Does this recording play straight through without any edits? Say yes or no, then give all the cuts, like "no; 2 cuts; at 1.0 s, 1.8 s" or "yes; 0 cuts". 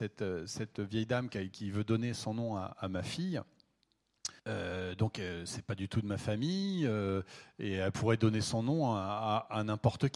no; 1 cut; at 4.4 s